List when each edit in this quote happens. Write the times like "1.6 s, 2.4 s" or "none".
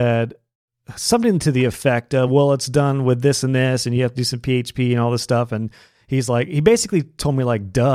none